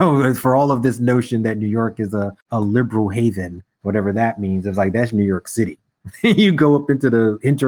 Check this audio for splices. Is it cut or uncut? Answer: cut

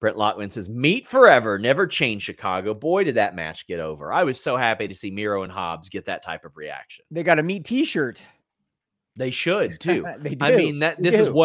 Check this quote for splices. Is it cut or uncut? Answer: uncut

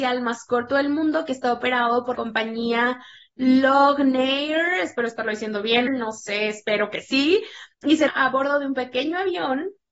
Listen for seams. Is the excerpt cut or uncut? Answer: cut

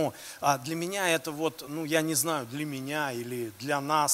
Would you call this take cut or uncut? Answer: uncut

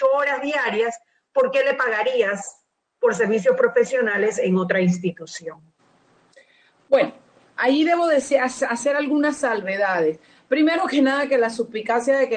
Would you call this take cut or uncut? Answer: uncut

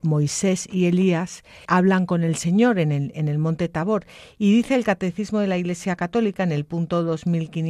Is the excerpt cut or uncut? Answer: cut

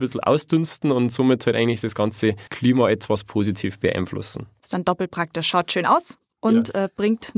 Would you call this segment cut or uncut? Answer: cut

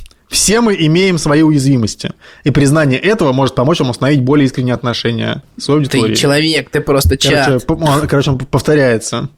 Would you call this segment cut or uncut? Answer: uncut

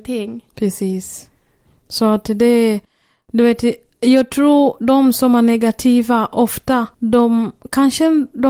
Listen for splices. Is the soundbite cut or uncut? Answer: uncut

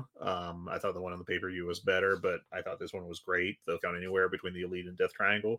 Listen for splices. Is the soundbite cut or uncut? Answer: cut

